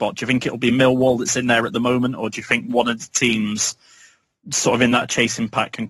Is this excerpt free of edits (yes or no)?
yes